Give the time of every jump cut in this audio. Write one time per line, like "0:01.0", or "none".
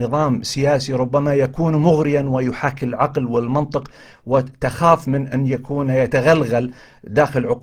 none

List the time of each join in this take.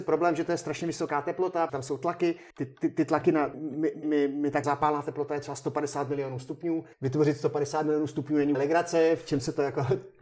0:01.7
0:02.5
0:03.5
0:04.0
0:04.6
0:06.9
0:08.5

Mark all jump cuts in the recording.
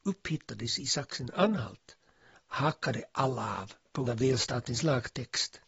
0:04.1

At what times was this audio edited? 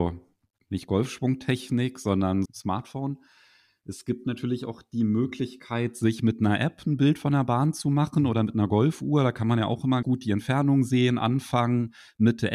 0:02.5
0:10.0

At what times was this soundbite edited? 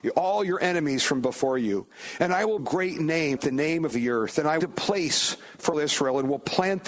0:02.6
0:03.4
0:03.9
0:04.6
0:05.7

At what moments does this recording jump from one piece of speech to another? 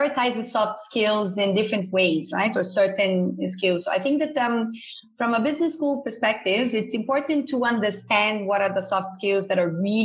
none

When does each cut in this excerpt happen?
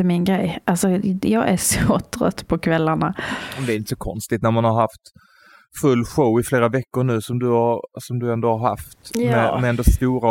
none

